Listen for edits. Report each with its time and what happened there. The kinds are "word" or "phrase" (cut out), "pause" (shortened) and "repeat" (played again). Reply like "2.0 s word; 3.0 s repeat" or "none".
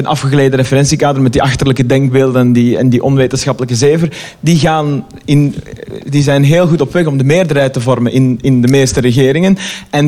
none